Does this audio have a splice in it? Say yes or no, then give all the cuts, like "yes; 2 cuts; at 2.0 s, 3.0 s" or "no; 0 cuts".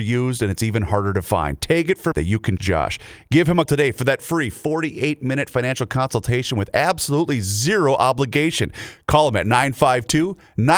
yes; 3 cuts; at 2.1 s, 2.6 s, 3.7 s